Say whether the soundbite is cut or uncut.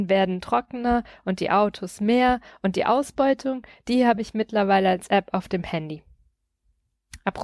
uncut